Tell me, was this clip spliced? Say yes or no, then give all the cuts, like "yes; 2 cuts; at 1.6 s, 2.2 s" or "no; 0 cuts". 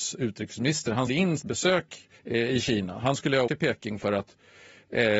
yes; 4 cuts; at 1.1 s, 1.4 s, 2.2 s, 3.5 s